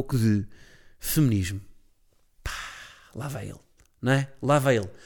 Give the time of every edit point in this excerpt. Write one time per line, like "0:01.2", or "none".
none